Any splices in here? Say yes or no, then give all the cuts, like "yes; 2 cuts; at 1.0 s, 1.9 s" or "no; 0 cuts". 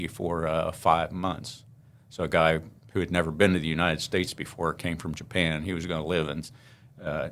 no; 0 cuts